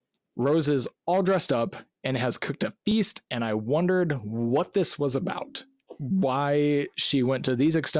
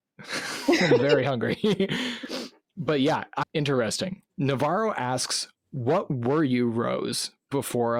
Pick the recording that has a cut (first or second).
second